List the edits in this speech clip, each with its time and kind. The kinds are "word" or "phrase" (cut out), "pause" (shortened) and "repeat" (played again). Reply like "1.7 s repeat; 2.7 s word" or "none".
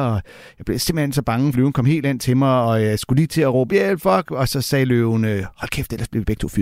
1.5 s word; 3.7 s word

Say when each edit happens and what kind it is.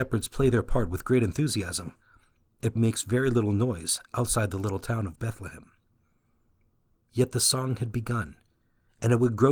2.8 s word

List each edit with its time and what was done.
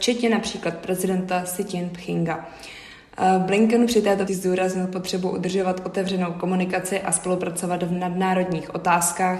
4.3 s word

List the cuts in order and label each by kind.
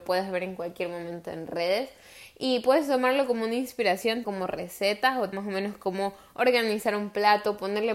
4.2 s word; 5.3 s word

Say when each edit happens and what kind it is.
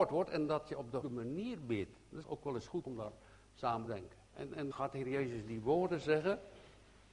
1.0 s word; 2.2 s word; 2.8 s word; 3.9 s phrase; 4.3 s pause; 4.7 s word

